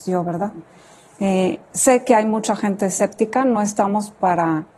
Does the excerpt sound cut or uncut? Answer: uncut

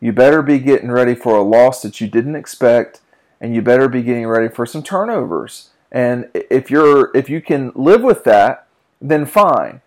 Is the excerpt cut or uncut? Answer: uncut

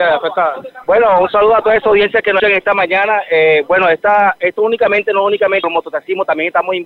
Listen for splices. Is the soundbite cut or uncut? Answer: cut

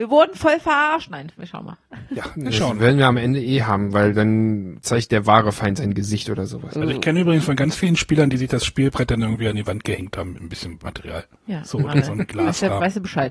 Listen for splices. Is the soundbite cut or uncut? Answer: uncut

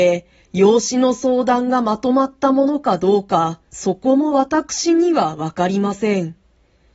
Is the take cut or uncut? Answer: cut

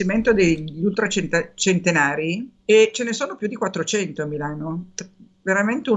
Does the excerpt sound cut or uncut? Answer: cut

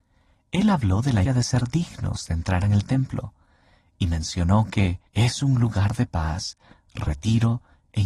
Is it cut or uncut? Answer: cut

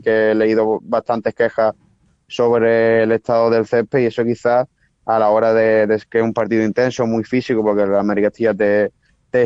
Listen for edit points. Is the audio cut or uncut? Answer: uncut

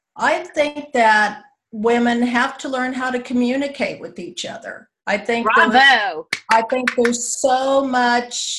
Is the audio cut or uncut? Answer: cut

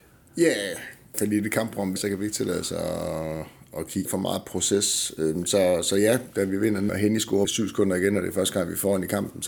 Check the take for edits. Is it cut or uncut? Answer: cut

